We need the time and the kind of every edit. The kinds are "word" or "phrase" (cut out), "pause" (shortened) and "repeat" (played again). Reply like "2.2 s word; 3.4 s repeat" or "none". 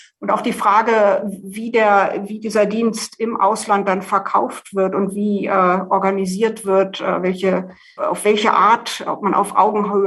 none